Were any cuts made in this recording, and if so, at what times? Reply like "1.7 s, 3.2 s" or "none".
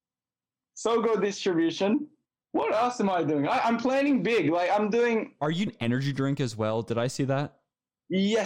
2.3 s, 5.7 s